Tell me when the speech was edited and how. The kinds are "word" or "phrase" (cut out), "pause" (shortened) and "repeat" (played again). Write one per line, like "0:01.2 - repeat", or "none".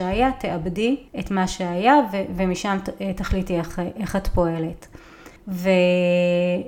0:01.1 - pause
0:05.4 - pause